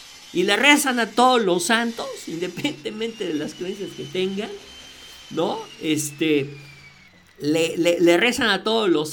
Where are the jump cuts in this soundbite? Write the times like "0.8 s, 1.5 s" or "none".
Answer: 7.1 s